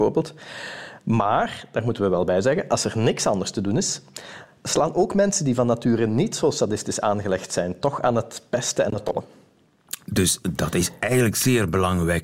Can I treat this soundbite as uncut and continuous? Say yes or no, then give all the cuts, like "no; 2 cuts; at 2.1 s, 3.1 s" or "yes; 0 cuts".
yes; 0 cuts